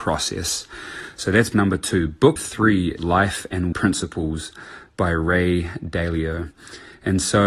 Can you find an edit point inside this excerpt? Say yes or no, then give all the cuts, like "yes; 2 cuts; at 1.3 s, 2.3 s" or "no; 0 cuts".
yes; 4 cuts; at 1.5 s, 2.4 s, 3.0 s, 3.7 s